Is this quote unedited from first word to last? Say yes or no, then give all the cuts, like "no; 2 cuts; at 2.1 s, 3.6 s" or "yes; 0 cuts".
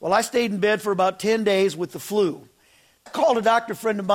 no; 1 cut; at 3.1 s